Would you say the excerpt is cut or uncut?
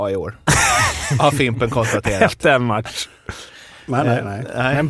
uncut